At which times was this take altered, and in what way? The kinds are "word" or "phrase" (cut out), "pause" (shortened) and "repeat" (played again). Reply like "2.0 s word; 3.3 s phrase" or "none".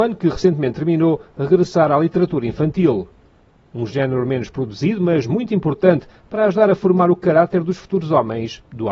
none